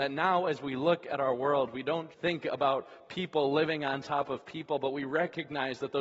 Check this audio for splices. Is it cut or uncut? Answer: cut